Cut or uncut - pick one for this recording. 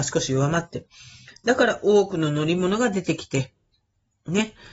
uncut